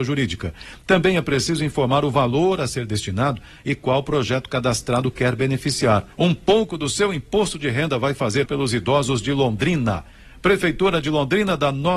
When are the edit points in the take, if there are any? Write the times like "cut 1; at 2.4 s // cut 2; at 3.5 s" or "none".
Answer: cut 1; at 6.1 s // cut 2; at 8.4 s